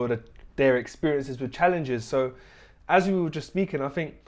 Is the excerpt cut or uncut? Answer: uncut